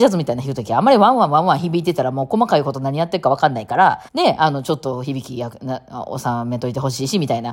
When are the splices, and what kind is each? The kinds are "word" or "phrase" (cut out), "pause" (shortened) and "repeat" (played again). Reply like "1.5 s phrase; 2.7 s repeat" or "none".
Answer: 4.1 s pause